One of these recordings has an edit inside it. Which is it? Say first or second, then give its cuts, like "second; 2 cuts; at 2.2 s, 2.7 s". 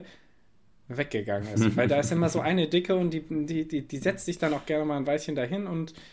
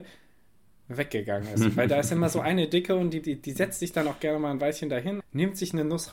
second; 2 cuts; at 3.2 s, 5.2 s